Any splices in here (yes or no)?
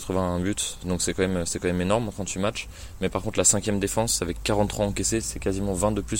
yes